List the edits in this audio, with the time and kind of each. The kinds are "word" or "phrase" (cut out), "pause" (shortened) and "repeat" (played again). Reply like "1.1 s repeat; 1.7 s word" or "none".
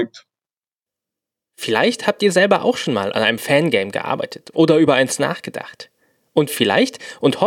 none